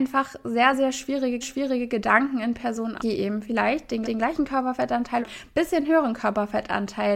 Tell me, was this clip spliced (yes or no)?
yes